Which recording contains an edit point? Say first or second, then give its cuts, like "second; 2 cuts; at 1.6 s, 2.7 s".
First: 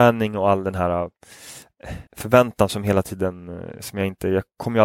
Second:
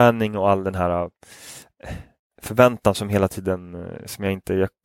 first; 1 cut; at 2.1 s